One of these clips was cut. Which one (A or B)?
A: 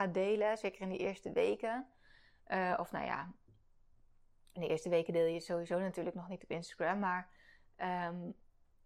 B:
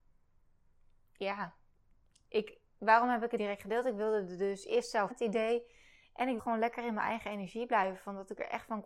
B